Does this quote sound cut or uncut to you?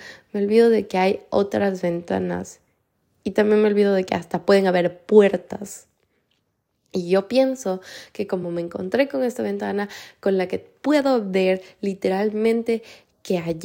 uncut